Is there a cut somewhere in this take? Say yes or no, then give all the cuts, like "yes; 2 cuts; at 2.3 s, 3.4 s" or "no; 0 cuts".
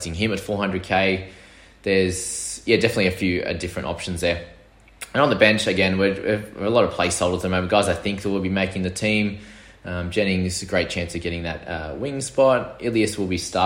no; 0 cuts